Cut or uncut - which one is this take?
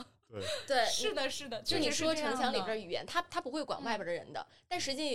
uncut